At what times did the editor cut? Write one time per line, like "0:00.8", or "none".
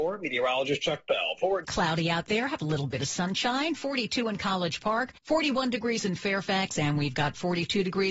0:01.6
0:05.2